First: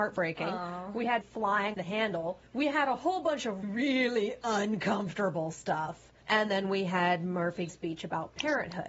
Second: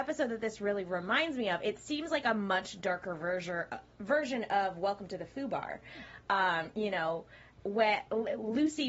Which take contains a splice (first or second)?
first